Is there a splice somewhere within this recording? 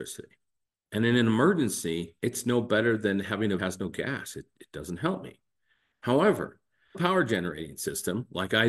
yes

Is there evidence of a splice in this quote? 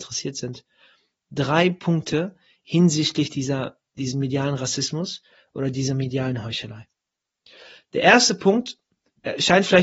no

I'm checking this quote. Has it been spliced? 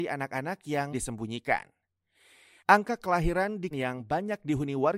yes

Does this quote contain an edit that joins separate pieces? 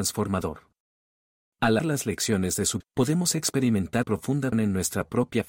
yes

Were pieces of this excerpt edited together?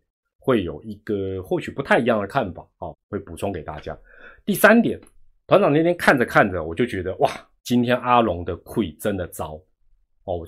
yes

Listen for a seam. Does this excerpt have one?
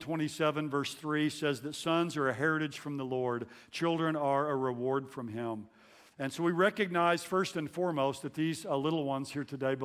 no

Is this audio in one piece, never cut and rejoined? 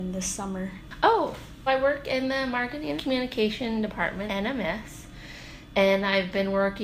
no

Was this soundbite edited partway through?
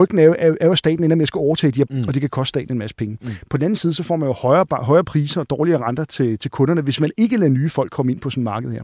yes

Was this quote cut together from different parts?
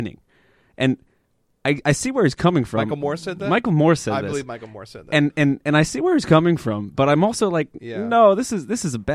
no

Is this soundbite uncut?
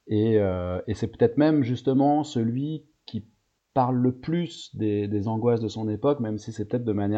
yes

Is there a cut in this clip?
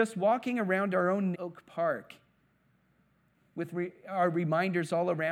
yes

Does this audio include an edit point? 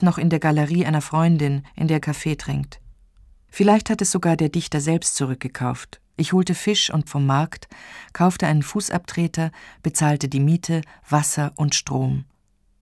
yes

